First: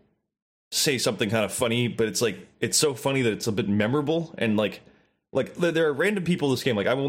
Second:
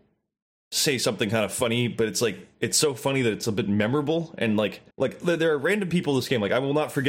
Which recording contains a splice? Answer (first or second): second